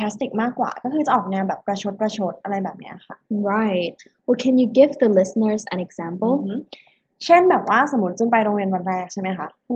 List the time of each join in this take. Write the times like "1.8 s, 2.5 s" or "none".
none